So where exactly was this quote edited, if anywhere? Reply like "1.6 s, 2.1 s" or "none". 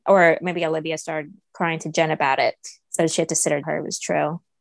3.6 s

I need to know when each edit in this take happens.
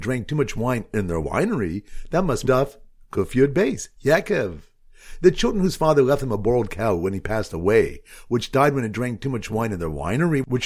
1.2 s, 2.5 s, 4.0 s

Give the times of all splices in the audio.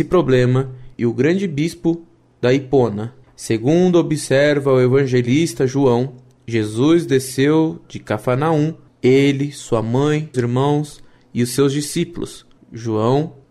10.3 s

